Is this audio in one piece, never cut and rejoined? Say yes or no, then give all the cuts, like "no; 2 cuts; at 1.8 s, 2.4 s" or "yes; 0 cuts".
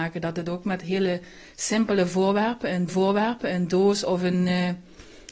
no; 1 cut; at 2.9 s